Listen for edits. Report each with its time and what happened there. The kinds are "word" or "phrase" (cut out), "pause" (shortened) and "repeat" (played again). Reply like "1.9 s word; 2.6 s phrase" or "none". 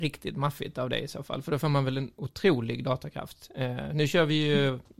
none